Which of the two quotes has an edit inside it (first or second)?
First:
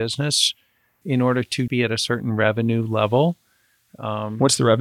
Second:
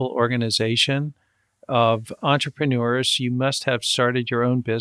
first